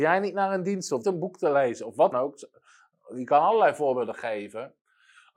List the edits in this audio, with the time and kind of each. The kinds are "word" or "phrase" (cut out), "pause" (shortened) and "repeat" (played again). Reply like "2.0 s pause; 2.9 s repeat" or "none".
1.0 s phrase; 2.1 s word